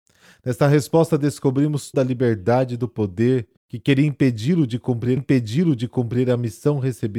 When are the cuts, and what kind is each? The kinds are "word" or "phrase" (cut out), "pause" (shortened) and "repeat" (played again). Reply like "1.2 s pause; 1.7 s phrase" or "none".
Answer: 1.9 s word; 3.6 s pause; 5.2 s repeat